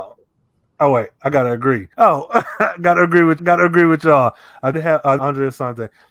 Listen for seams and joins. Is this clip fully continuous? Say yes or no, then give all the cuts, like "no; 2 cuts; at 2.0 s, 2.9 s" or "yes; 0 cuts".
no; 4 cuts; at 1.9 s, 3.4 s, 4.7 s, 5.2 s